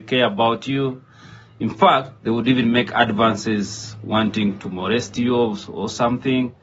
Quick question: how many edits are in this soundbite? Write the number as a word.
one